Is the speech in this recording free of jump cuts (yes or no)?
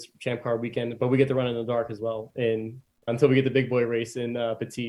no